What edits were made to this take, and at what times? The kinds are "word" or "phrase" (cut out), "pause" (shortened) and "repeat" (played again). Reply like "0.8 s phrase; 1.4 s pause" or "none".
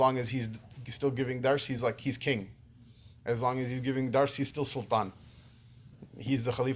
none